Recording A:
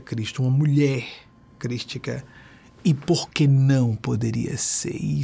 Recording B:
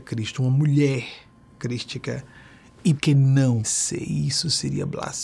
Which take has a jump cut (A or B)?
B